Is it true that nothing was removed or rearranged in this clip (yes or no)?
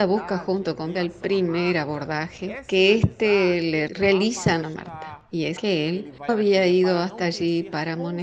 no